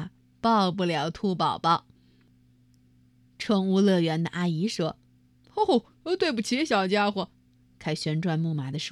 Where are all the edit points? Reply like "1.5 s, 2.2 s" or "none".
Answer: 5.0 s